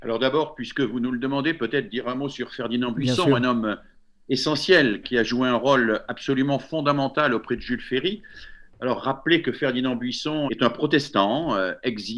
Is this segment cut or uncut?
cut